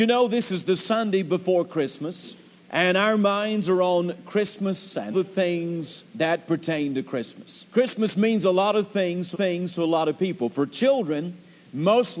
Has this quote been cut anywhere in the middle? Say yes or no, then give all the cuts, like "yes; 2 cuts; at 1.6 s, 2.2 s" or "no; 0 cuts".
yes; 5 cuts; at 2.6 s, 5.1 s, 6.1 s, 7.7 s, 9.3 s